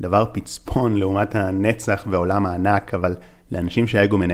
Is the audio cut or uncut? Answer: uncut